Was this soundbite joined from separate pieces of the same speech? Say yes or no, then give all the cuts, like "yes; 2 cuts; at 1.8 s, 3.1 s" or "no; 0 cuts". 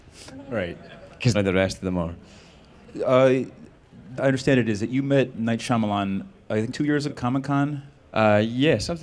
yes; 5 cuts; at 1.3 s, 4.2 s, 5.3 s, 6.7 s, 7.1 s